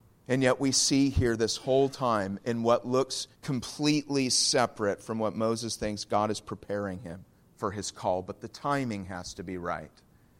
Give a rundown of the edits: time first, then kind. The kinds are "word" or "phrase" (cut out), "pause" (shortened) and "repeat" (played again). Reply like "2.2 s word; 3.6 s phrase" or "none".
3.3 s pause; 7.4 s pause